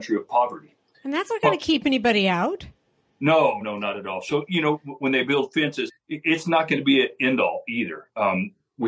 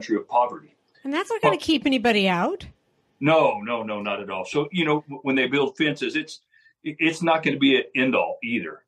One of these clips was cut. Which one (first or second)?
first